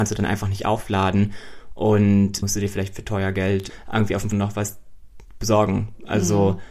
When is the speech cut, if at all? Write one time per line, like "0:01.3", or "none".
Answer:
0:02.4
0:03.7
0:04.3

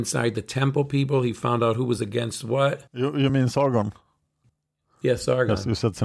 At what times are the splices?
none

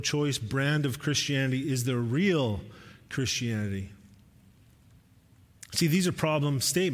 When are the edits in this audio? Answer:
none

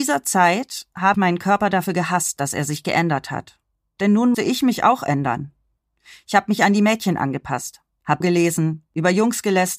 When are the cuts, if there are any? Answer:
0:01.1
0:04.3
0:08.2

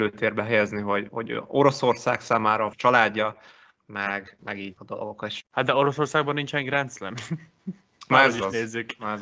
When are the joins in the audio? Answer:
0:01.1
0:02.7
0:04.4
0:04.8

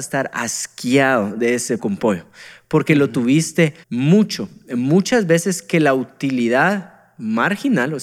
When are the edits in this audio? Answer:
0:01.8
0:03.8

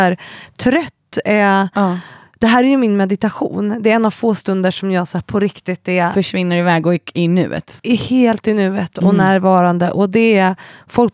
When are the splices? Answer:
none

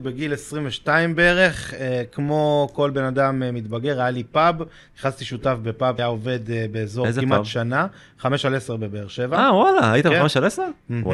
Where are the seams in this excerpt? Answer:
0:06.0

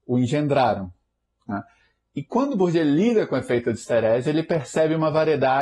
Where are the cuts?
none

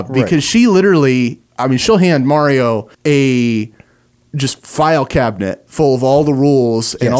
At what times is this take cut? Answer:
0:02.9

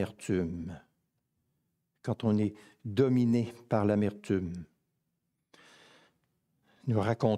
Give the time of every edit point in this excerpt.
none

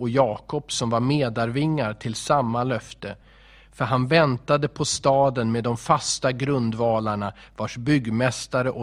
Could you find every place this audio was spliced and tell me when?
none

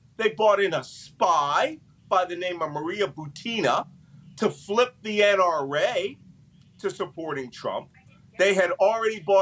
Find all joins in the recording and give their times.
none

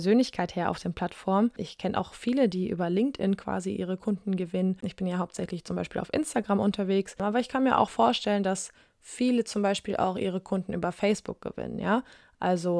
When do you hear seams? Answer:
none

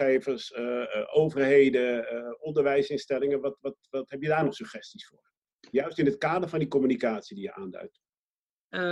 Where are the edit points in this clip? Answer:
none

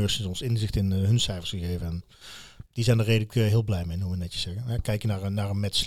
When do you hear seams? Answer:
0:02.7

